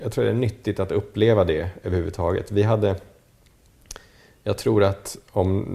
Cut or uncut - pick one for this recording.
uncut